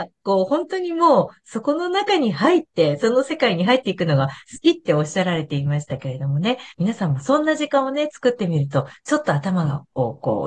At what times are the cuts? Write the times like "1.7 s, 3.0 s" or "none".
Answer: 6.7 s